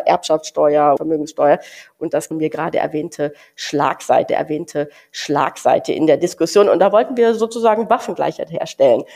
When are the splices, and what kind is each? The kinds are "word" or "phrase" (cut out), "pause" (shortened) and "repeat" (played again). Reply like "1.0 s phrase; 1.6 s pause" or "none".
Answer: 1.0 s word; 2.3 s phrase; 4.3 s repeat